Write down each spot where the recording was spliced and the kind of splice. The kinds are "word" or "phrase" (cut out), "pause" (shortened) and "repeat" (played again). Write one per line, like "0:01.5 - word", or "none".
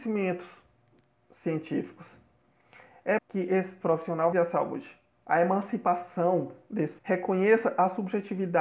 0:01.0 - pause
0:03.2 - word
0:04.3 - word
0:07.0 - word